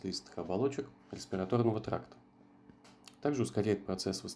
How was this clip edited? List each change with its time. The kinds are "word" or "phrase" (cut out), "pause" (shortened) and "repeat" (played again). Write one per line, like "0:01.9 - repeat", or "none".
0:01.0 - pause